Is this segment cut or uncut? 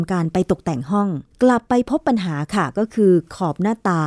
cut